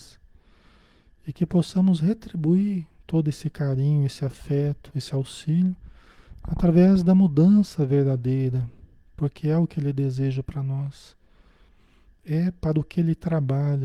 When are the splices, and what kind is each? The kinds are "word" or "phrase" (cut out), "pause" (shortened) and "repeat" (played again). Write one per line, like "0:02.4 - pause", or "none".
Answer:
none